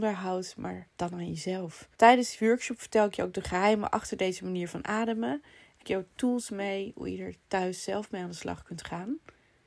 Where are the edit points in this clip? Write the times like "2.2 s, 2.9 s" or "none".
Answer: 0.9 s, 1.9 s, 5.8 s